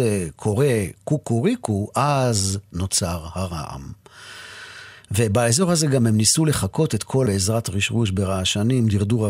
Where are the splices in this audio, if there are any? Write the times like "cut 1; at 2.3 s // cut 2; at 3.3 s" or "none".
cut 1; at 7.3 s